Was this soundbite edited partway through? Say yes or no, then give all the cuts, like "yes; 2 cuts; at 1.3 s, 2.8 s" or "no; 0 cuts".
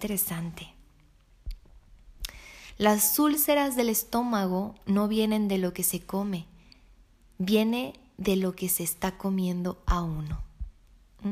no; 0 cuts